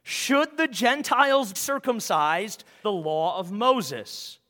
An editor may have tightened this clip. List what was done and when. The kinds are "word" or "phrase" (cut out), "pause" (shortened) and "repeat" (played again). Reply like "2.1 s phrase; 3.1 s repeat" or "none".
1.5 s word; 2.8 s phrase